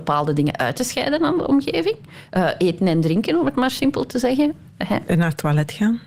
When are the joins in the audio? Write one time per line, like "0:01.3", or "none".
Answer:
none